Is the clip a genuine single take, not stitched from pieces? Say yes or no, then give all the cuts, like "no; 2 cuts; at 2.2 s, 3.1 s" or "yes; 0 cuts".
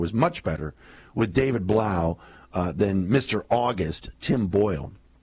yes; 0 cuts